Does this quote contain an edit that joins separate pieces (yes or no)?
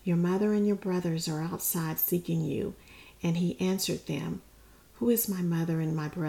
no